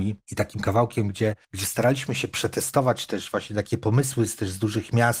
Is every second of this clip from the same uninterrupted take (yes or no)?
no